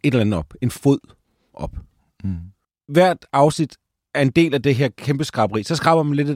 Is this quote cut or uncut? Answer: uncut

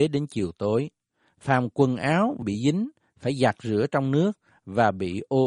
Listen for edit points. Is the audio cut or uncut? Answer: cut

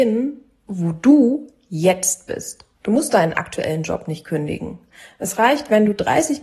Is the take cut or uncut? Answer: cut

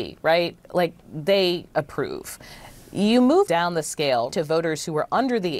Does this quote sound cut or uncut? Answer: cut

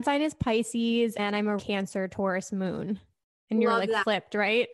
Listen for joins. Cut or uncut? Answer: cut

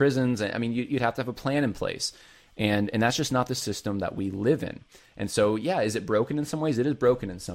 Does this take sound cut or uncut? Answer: uncut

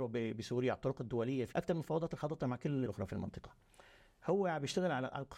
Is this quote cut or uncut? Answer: cut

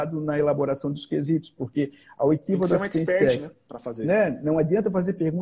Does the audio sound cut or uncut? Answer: uncut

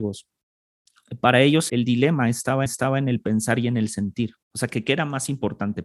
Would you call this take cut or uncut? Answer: cut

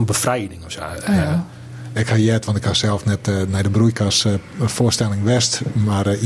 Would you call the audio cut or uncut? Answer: uncut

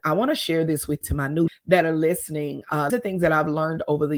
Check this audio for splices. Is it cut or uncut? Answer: cut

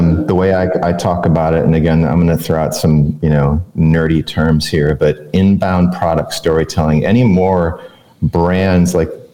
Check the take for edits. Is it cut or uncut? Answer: uncut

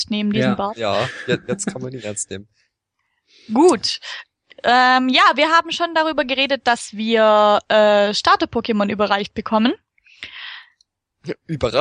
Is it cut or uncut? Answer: uncut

